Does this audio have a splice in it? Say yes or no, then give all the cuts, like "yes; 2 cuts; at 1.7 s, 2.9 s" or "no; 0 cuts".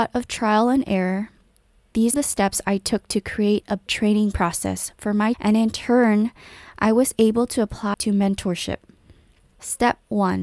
yes; 4 cuts; at 2.1 s, 3.9 s, 5.3 s, 7.9 s